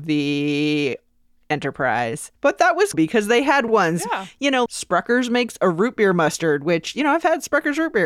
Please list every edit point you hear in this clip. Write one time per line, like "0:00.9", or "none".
0:02.3
0:02.9
0:03.7
0:04.7